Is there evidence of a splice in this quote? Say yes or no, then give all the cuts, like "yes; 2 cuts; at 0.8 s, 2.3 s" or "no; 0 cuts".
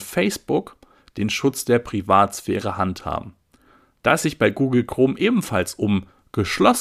no; 0 cuts